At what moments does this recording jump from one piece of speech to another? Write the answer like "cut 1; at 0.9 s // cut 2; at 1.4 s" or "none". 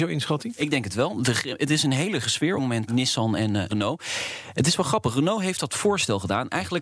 cut 1; at 2.2 s // cut 2; at 2.6 s // cut 3; at 2.9 s // cut 4; at 3.7 s